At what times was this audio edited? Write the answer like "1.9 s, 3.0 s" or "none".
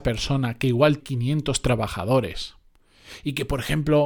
1.0 s